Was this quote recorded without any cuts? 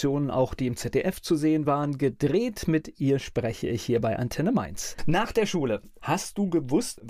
yes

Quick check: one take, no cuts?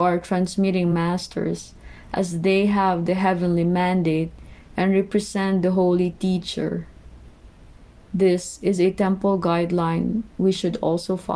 yes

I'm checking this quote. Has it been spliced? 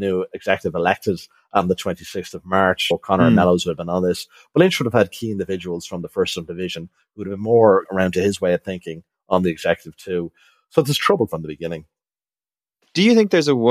no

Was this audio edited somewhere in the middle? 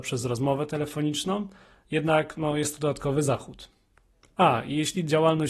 no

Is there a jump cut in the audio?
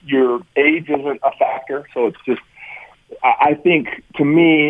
no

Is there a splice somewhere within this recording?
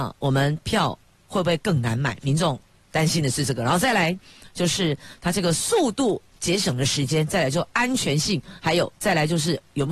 no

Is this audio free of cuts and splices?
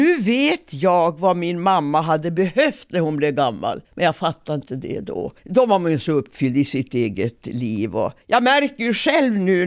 no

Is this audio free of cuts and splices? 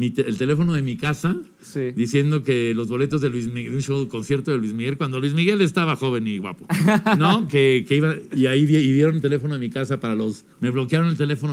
no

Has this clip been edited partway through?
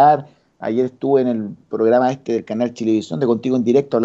no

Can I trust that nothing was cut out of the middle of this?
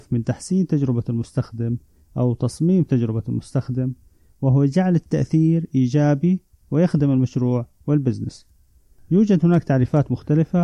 yes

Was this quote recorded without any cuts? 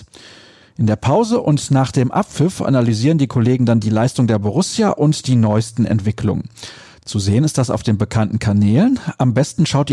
yes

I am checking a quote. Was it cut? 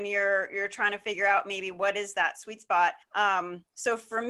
yes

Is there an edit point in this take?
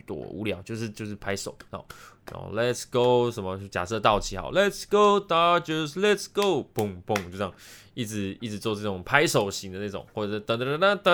no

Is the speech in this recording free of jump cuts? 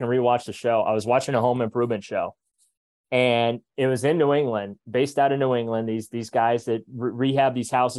yes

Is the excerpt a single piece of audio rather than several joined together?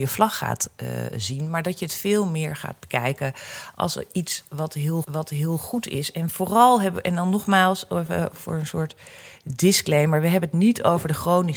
no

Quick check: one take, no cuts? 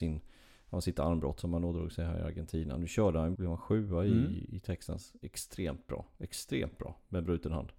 no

